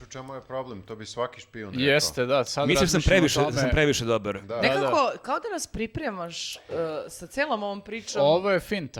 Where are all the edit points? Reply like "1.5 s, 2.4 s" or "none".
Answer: none

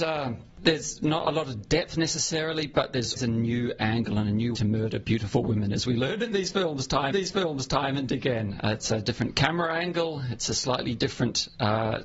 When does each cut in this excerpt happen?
3.2 s, 4.5 s, 7.1 s

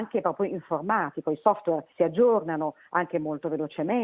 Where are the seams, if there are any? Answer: 1.9 s

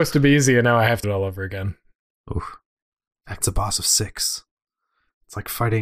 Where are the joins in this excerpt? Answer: 1.0 s, 3.4 s

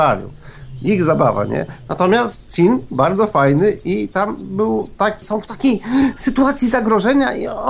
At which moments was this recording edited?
5.2 s

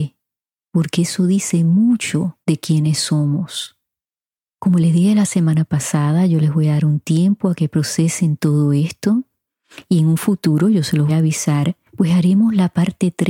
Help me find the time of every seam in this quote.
2.4 s, 11.1 s, 11.9 s

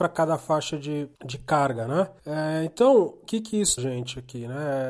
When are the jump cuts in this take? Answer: 1.1 s, 2.2 s, 3.2 s, 3.8 s

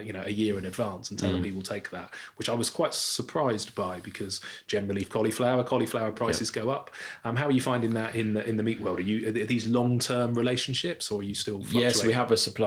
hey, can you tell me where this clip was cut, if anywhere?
5.0 s

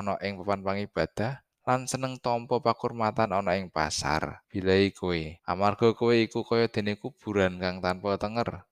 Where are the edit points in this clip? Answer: 1.5 s, 4.4 s, 5.4 s

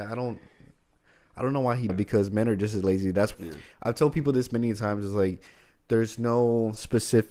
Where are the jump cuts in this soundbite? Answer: 1.9 s, 3.3 s

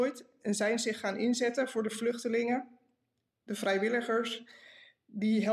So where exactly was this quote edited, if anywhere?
none

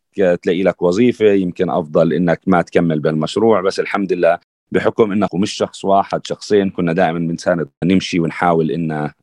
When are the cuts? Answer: 5.3 s, 7.8 s

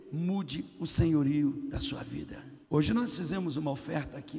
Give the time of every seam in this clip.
2.6 s

